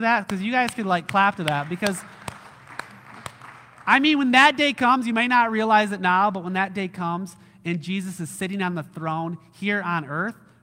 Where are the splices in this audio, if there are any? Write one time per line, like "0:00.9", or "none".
none